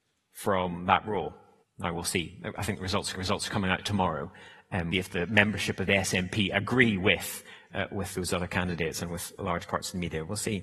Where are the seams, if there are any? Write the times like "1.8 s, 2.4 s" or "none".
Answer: 1.6 s, 3.1 s, 4.9 s, 7.7 s, 9.4 s